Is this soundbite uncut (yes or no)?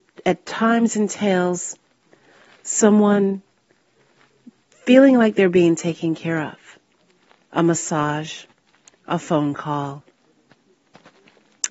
yes